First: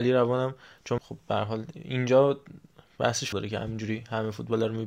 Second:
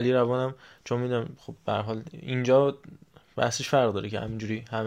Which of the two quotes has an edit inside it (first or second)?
first